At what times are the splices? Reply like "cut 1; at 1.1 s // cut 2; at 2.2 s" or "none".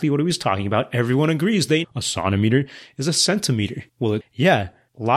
cut 1; at 1.8 s // cut 2; at 3.9 s // cut 3; at 4.2 s

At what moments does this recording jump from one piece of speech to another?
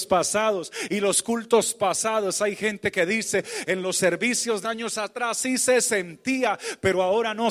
cut 1; at 4.6 s

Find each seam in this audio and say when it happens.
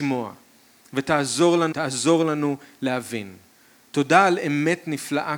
cut 1; at 1.7 s

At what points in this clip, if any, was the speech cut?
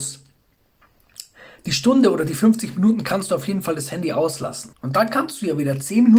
cut 1; at 4.7 s

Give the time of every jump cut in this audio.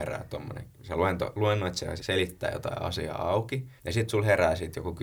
cut 1; at 2.0 s // cut 2; at 3.8 s

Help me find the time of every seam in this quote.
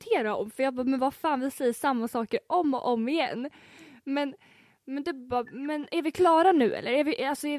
none

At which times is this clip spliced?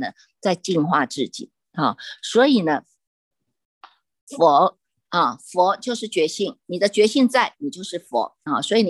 none

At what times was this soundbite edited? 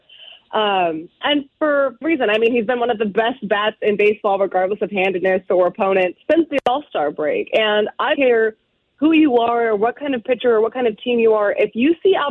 cut 1; at 1.2 s // cut 2; at 2.0 s // cut 3; at 6.2 s // cut 4; at 8.1 s

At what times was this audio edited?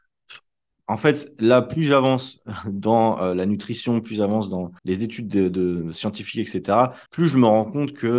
cut 1; at 4.8 s // cut 2; at 7.1 s

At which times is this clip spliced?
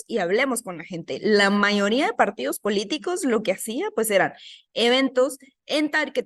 none

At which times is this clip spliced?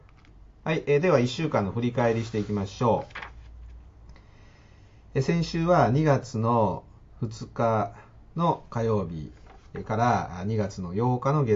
none

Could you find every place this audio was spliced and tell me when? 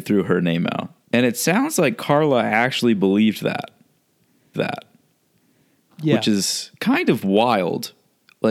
cut 1; at 1.0 s // cut 2; at 4.5 s // cut 3; at 6.8 s

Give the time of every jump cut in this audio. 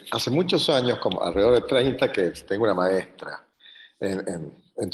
none

